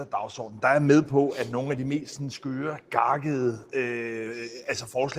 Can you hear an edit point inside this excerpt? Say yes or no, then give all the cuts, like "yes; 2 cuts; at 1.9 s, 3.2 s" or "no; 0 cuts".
no; 0 cuts